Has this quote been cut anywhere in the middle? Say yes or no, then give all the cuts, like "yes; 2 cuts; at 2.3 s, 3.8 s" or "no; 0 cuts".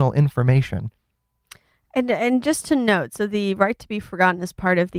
no; 0 cuts